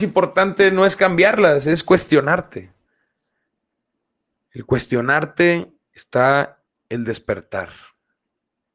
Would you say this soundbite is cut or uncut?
uncut